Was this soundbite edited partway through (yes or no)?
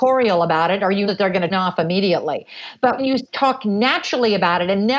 yes